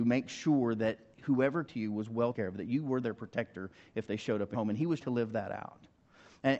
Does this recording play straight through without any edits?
no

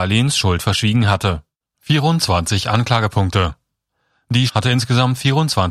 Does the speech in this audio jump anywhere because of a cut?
yes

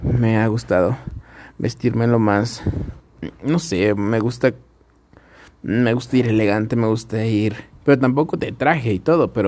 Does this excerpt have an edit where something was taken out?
no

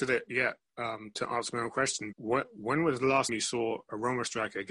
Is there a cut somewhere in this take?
yes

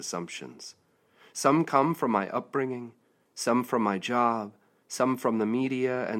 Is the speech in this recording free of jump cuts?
yes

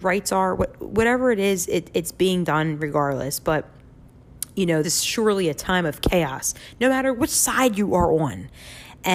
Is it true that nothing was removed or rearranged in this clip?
no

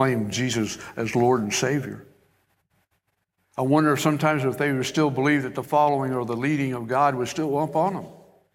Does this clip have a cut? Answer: no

